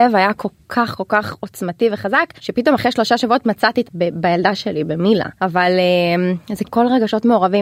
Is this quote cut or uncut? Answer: cut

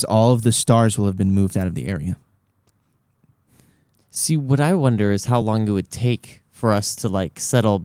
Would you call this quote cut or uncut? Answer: uncut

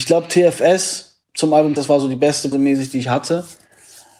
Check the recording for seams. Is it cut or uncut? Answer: cut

